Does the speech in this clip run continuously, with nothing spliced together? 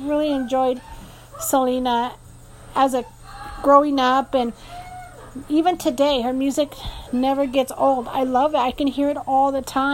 yes; 0 cuts

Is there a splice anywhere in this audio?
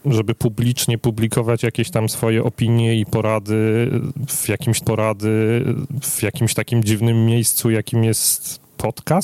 yes; 1 cut; at 4.8 s

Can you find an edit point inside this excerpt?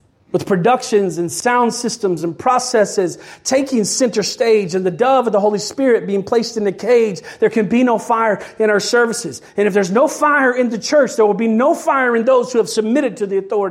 no; 0 cuts

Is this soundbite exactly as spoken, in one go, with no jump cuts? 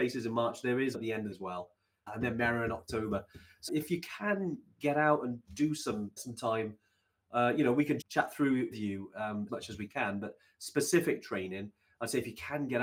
no; 8 cuts; at 0.9 s, 1.3 s, 2.1 s, 3.7 s, 6.2 s, 8.0 s, 8.7 s, 9.5 s

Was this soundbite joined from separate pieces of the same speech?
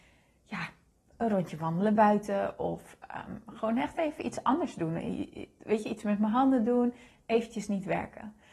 no; 0 cuts

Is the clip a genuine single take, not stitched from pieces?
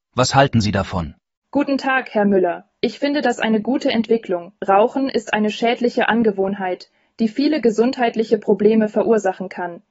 no; 3 cuts; at 1.3 s, 2.8 s, 4.6 s

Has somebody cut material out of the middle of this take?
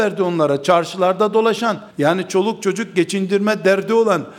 yes; 1 cut; at 1.9 s

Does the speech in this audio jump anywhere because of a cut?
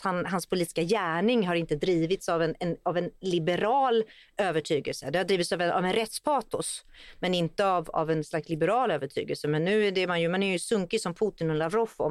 no; 0 cuts

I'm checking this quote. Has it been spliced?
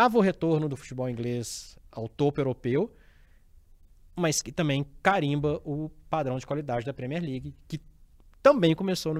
no; 0 cuts

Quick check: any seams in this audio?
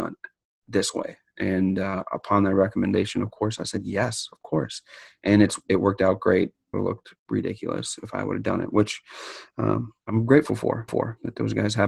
yes; 4 cuts; at 6.7 s, 7.2 s, 10.0 s, 10.9 s

